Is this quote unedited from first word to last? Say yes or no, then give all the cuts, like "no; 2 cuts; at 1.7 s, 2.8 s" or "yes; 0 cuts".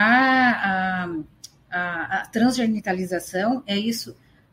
yes; 0 cuts